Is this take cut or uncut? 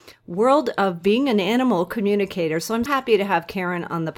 cut